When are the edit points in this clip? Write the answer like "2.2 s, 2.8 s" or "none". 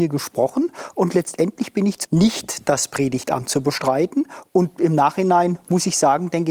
2.0 s